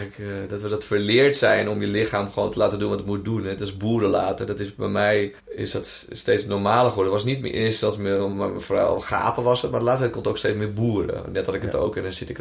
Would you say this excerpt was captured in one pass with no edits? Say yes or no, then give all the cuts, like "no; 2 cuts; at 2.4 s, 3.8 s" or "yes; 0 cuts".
no; 1 cut; at 5.4 s